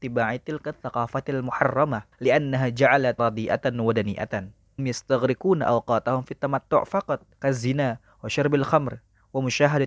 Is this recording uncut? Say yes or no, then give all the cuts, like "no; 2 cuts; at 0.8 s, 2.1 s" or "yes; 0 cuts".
no; 4 cuts; at 2.1 s, 3.2 s, 4.8 s, 7.3 s